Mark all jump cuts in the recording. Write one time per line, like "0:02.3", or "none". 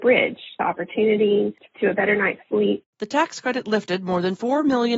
0:01.7
0:02.9